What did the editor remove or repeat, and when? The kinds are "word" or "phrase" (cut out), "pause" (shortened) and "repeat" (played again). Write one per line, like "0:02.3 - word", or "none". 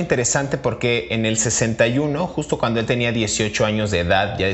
none